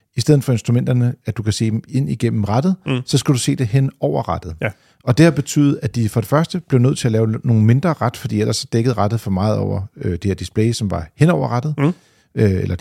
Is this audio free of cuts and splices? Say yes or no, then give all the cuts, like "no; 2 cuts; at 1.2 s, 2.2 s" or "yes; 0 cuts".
yes; 0 cuts